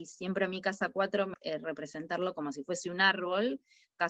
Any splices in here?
yes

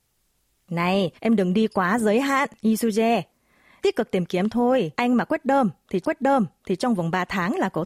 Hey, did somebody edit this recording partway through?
yes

